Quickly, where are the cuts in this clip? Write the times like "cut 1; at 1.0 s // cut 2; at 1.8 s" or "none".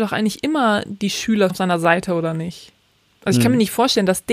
cut 1; at 1.5 s

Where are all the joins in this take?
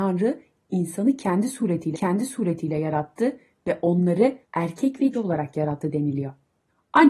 cut 1; at 1.9 s // cut 2; at 4.4 s // cut 3; at 5.1 s

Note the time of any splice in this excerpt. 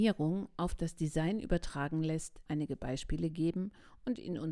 cut 1; at 2.5 s

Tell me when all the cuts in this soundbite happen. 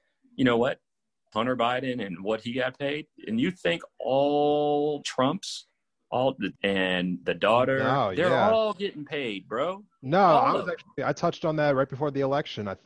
cut 1; at 1.3 s // cut 2; at 3.1 s // cut 3; at 5.0 s // cut 4; at 6.6 s

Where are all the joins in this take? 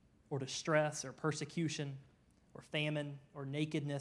none

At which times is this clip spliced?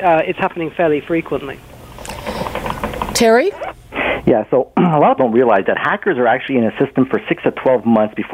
cut 1; at 5.2 s

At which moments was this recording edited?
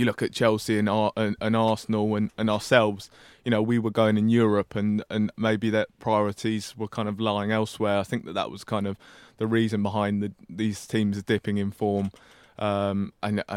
none

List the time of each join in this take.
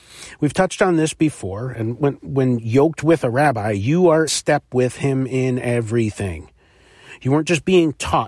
cut 1; at 4.3 s

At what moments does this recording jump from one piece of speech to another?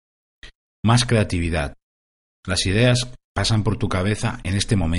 none

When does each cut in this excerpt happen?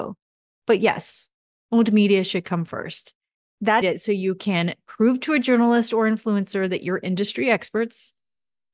cut 1; at 3.8 s

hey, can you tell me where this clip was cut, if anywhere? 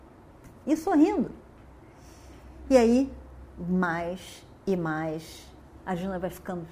cut 1; at 5.8 s

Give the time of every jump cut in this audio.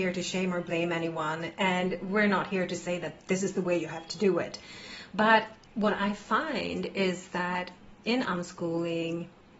cut 1; at 5.6 s

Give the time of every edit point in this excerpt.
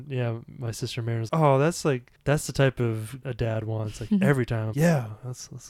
cut 1; at 1.3 s // cut 2; at 2.2 s // cut 3; at 3.2 s // cut 4; at 4.7 s

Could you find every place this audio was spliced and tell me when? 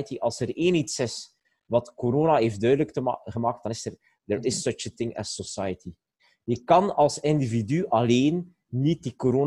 none

